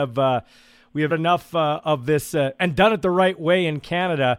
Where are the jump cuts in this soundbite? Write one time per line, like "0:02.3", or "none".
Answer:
0:01.1